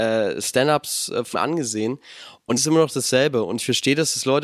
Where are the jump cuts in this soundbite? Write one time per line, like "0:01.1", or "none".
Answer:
0:01.3
0:02.6